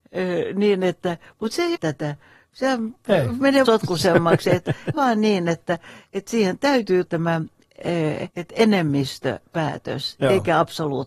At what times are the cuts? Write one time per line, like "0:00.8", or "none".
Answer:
0:01.7
0:03.7
0:04.9
0:07.1
0:08.3